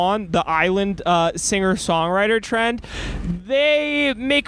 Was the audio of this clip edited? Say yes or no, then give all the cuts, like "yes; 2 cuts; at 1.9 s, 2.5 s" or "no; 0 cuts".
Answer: no; 0 cuts